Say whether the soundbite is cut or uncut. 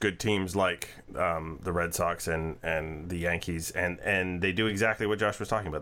uncut